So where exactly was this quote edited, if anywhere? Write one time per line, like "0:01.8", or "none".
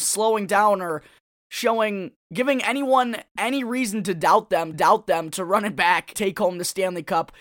0:02.2
0:04.7
0:06.1